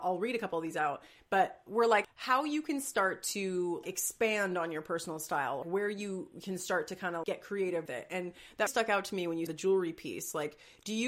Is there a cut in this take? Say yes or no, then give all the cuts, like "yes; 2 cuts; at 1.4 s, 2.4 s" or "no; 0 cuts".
yes; 8 cuts; at 1.7 s, 2.0 s, 3.8 s, 5.6 s, 7.2 s, 7.9 s, 8.7 s, 9.5 s